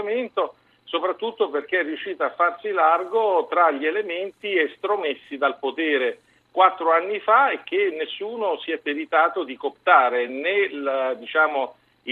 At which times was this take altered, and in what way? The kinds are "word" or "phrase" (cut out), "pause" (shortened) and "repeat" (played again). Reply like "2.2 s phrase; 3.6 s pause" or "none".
none